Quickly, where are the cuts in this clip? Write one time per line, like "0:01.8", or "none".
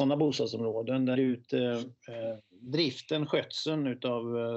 0:01.1

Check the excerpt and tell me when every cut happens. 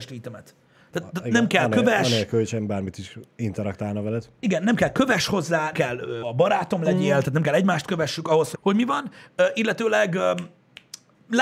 0:05.7
0:06.2
0:08.5

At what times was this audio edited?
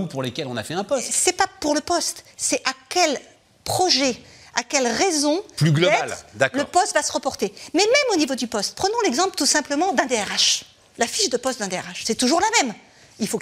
none

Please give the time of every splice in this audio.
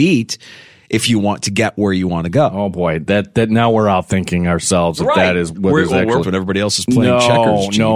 0:05.5
0:06.2

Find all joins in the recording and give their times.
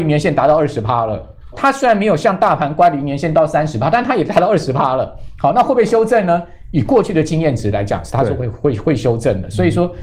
0:01.5

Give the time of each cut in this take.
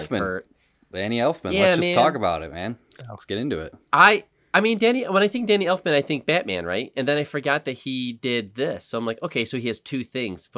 none

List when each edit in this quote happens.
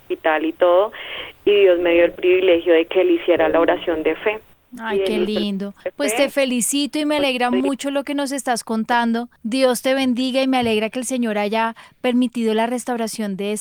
0:04.5
0:05.8
0:09.4

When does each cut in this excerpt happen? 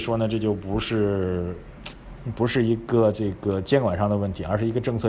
none

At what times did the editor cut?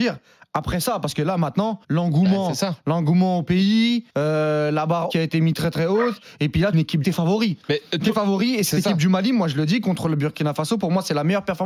0:01.8
0:04.1
0:05.1
0:06.7
0:07.0
0:07.9

